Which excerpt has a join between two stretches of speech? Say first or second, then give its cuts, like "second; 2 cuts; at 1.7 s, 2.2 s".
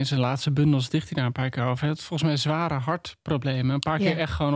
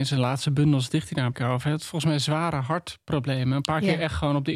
second; 1 cut; at 1.3 s